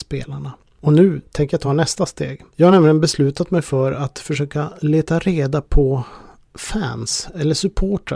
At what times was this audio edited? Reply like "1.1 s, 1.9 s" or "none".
none